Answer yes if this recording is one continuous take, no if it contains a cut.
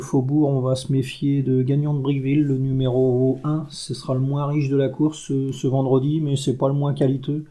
yes